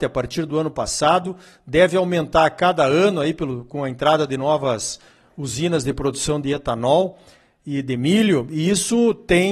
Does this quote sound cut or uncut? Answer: uncut